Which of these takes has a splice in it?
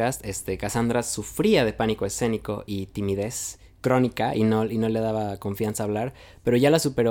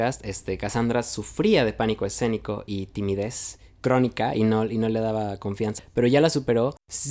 second; 1 cut; at 5.8 s

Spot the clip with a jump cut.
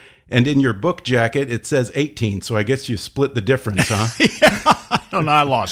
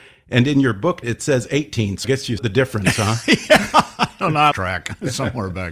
second; 4 cuts; at 1.0 s, 2.0 s, 2.4 s, 4.5 s

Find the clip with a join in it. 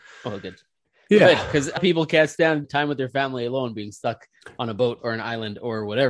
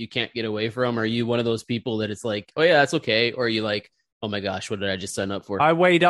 first; 2 cuts; at 1.8 s, 2.6 s

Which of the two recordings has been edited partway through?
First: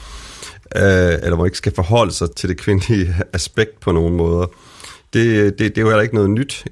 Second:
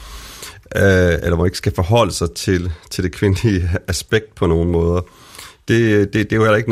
first; 1 cut; at 2.3 s

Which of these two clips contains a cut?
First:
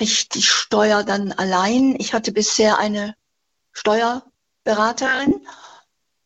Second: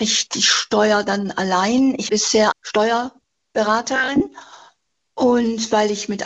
second; 2 cuts; at 2.1 s, 2.5 s

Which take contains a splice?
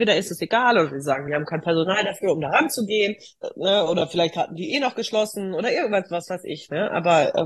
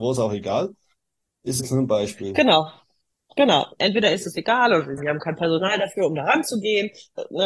second; 2 cuts; at 1.6 s, 5.0 s

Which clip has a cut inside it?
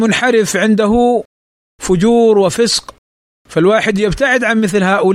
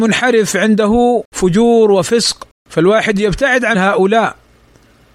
second; 3 cuts; at 1.3 s, 2.6 s, 3.7 s

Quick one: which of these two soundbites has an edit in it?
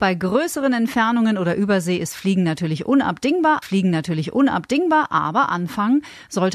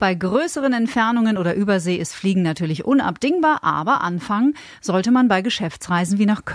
first; 1 cut; at 3.6 s

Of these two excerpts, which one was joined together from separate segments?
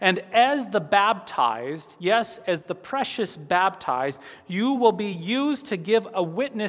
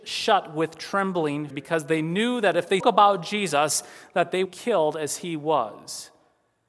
second; 3 cuts; at 1.5 s, 2.8 s, 4.4 s

